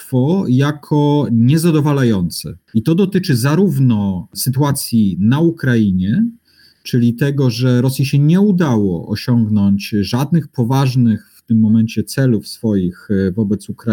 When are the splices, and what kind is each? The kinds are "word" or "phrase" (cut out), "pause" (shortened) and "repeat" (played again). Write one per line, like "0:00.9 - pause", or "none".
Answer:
none